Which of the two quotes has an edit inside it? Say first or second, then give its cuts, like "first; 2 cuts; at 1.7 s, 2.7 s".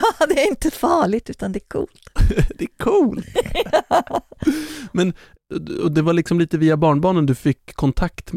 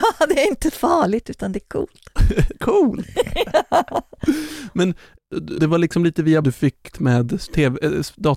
second; 4 cuts; at 2.6 s, 5.6 s, 6.4 s, 6.9 s